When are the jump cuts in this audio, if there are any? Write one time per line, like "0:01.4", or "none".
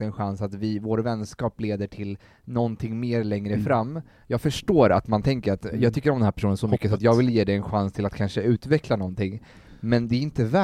none